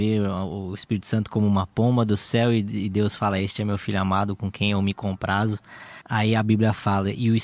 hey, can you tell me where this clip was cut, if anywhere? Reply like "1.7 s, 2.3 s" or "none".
6.0 s